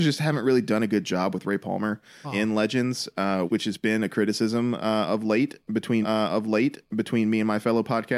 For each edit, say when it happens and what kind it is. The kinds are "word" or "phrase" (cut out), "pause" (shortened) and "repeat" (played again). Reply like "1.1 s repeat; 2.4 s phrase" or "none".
2.2 s word; 3.5 s word; 6.0 s repeat